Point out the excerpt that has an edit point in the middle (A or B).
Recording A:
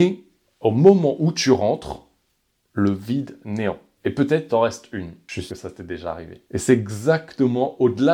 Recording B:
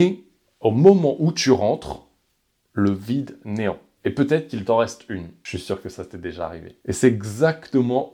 A